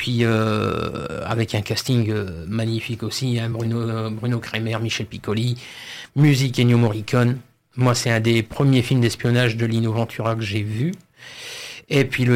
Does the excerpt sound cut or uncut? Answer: uncut